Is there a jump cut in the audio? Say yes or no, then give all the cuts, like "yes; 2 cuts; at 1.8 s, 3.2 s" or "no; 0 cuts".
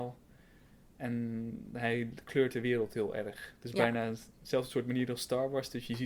no; 0 cuts